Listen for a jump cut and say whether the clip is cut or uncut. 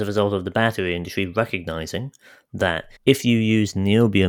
cut